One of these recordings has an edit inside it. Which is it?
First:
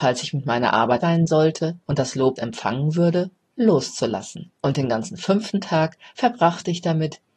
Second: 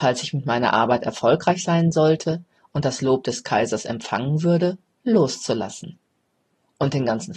first; 4 cuts; at 1.0 s, 1.8 s, 2.4 s, 4.6 s

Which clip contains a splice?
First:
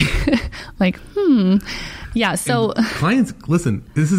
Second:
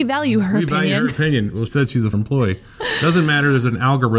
second; 2 cuts; at 1.7 s, 2.1 s

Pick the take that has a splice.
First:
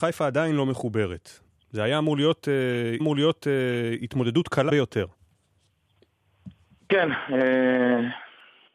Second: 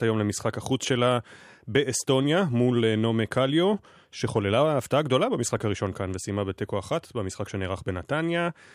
first; 3 cuts; at 1.5 s, 3.0 s, 4.7 s

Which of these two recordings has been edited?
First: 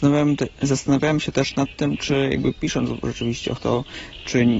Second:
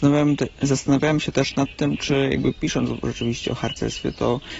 first; 1 cut; at 3.6 s

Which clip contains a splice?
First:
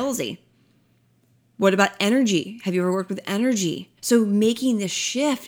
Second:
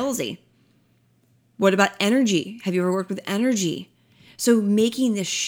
first; 1 cut; at 4.0 s

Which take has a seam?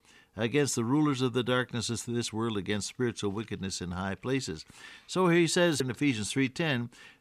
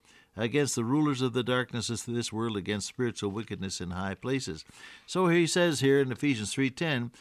first; 1 cut; at 5.8 s

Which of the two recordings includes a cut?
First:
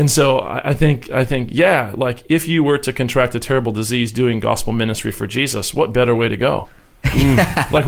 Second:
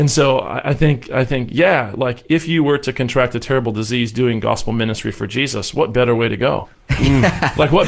second; 1 cut; at 6.7 s

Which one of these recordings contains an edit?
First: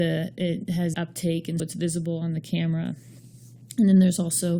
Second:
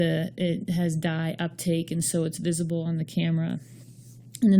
first; 2 cuts; at 0.9 s, 1.6 s

